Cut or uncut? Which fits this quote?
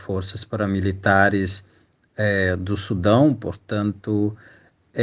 uncut